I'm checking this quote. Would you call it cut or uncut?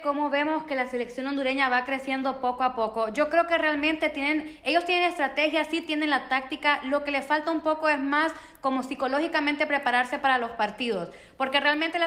uncut